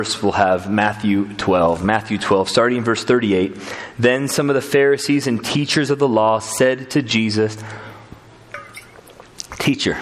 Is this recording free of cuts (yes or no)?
yes